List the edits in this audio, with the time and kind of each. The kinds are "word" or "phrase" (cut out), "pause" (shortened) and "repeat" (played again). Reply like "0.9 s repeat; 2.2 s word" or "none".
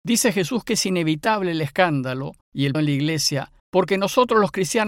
2.4 s pause; 2.7 s word; 3.6 s pause

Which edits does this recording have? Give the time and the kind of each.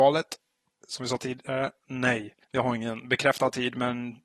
2.4 s pause

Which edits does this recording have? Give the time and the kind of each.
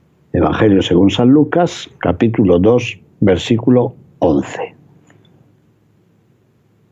none

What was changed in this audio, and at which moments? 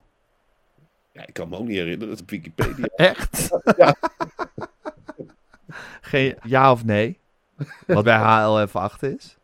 2.2 s word; 6.4 s word; 8.0 s word

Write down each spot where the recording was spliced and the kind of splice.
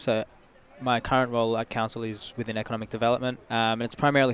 3.4 s pause

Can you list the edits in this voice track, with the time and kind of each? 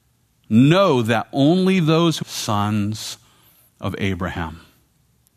2.2 s phrase

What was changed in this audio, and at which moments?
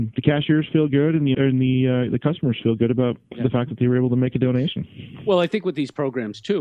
1.3 s word

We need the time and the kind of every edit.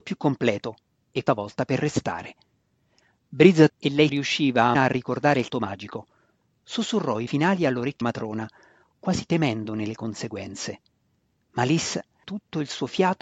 1.3 s word; 3.7 s word; 4.1 s word; 4.8 s word; 5.5 s word; 7.3 s word; 8.0 s word; 12.2 s word

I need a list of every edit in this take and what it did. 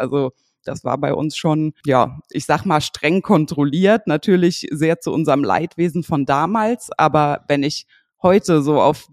none

